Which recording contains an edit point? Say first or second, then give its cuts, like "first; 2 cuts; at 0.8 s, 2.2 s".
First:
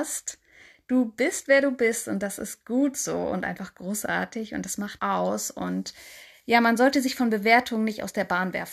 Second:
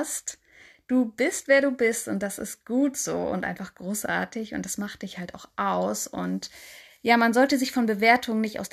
first; 1 cut; at 5.0 s